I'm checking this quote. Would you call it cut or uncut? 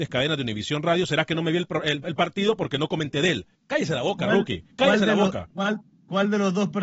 cut